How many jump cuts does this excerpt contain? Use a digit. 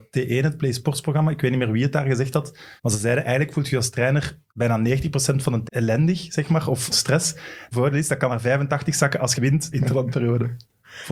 7